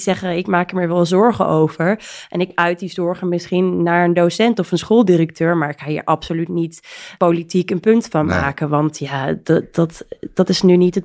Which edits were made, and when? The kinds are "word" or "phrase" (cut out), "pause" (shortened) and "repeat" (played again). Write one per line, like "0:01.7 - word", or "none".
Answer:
none